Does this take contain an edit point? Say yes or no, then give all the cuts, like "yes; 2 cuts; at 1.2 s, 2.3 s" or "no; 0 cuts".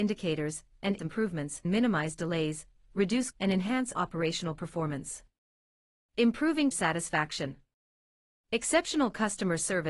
yes; 5 cuts; at 1.0 s, 1.6 s, 3.3 s, 3.9 s, 6.7 s